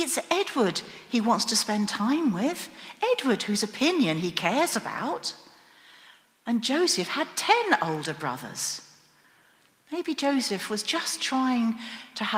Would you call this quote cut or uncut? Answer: uncut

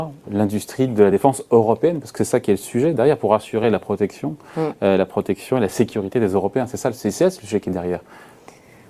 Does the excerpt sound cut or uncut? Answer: uncut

